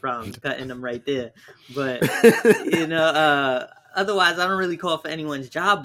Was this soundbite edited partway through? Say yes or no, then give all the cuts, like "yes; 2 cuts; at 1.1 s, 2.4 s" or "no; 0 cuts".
no; 0 cuts